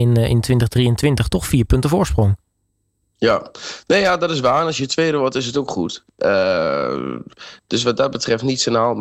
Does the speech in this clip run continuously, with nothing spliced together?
no; 1 cut; at 1.3 s

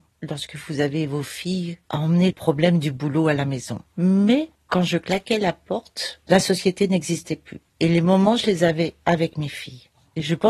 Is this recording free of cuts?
no; 2 cuts; at 2.3 s, 7.7 s

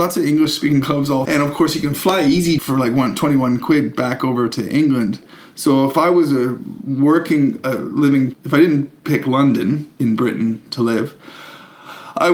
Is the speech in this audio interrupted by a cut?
yes; 4 cuts; at 1.2 s, 2.6 s, 8.3 s, 9.9 s

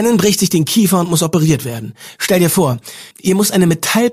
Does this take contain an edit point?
yes; 1 cut; at 3.1 s

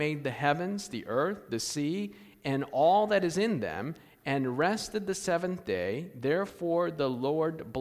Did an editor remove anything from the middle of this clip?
no; 0 cuts

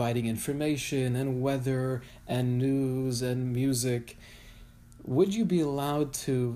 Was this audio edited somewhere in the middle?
no; 0 cuts

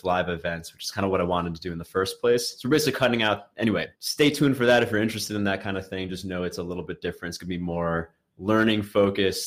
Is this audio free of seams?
no; 1 cut; at 3.9 s

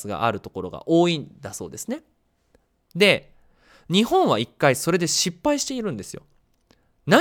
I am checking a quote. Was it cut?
no; 0 cuts

